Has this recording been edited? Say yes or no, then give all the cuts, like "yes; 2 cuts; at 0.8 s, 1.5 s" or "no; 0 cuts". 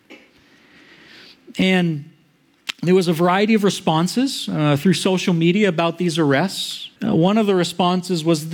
yes; 1 cut; at 7.0 s